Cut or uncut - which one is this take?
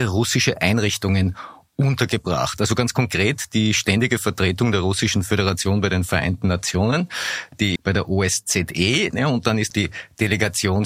cut